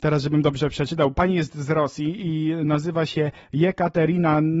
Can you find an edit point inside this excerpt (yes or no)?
no